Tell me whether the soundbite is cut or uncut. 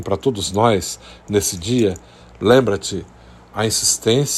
uncut